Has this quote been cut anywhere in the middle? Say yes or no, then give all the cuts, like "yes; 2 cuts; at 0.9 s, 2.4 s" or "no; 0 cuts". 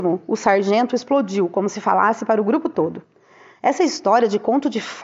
no; 0 cuts